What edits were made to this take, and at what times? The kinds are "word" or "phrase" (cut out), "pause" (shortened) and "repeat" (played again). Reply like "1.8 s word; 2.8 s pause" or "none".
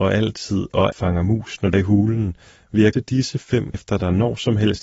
0.9 s word; 1.7 s word; 2.9 s word; 3.7 s word